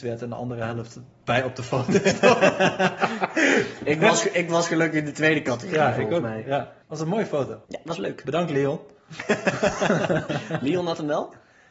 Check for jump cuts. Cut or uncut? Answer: cut